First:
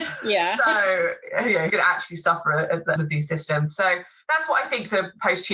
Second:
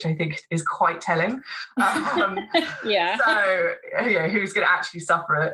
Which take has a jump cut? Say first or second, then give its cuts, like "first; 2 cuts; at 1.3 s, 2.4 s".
first; 2 cuts; at 1.7 s, 3.0 s